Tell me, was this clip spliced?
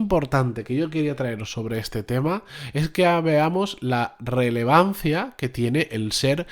no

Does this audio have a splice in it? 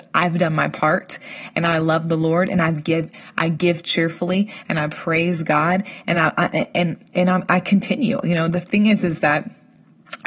no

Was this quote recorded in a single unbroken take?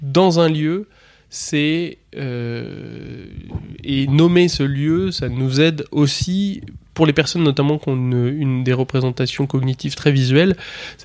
yes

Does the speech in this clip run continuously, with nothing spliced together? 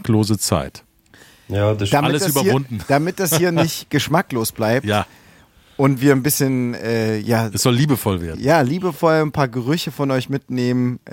yes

